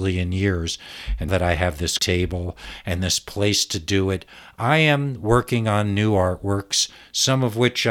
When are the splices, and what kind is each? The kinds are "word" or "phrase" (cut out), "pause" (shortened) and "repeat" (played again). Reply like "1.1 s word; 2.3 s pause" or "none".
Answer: 1.3 s word; 2.0 s word